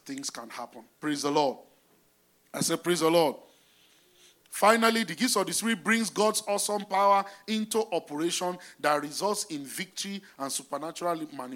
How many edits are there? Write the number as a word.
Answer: zero